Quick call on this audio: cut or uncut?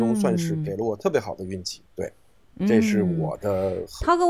cut